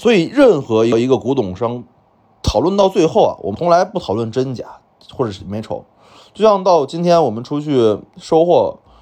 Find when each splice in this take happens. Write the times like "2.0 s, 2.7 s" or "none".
none